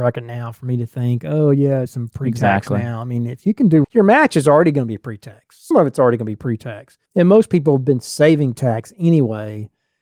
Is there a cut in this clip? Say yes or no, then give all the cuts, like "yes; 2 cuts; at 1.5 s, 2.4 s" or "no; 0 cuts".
yes; 5 cuts; at 1.9 s, 3.8 s, 5.7 s, 7.1 s, 8.5 s